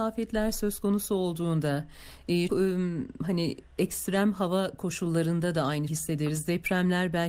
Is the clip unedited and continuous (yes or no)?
no